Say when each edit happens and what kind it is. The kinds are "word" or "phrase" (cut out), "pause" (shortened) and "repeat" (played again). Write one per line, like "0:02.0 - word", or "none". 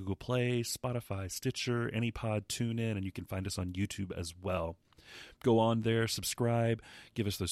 0:05.4 - pause